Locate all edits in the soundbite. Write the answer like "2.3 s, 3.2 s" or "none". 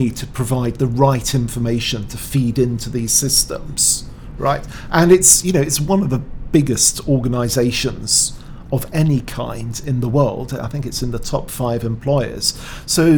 none

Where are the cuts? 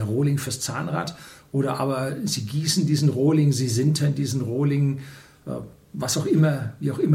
none

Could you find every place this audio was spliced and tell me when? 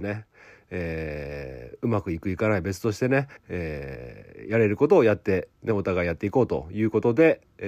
3.4 s

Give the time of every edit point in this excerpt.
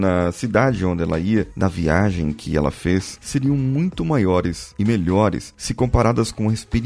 none

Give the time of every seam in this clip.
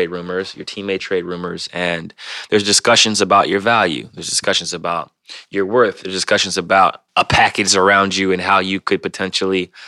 1.0 s, 7.1 s

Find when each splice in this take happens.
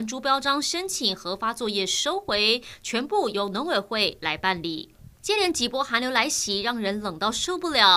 5.1 s

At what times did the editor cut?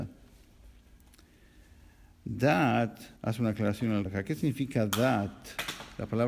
3.2 s, 4.1 s

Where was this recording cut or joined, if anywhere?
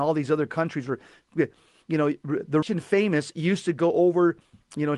2.6 s

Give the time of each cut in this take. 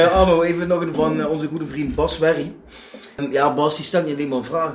0.9 s

